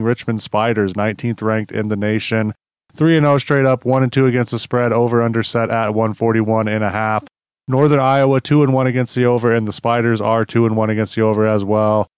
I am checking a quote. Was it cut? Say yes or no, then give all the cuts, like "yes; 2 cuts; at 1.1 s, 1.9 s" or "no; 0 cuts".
no; 0 cuts